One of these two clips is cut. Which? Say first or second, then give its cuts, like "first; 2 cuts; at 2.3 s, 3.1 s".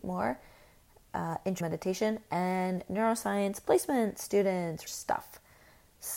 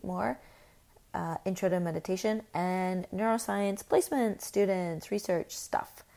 first; 2 cuts; at 1.6 s, 4.9 s